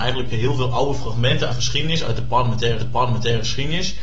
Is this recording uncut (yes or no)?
no